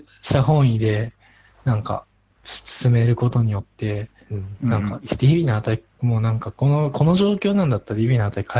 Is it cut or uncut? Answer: uncut